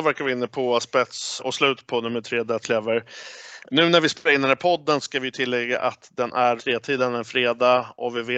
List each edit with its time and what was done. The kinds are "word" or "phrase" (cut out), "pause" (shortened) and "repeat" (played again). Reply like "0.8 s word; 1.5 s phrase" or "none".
1.4 s word; 2.6 s word; 6.6 s word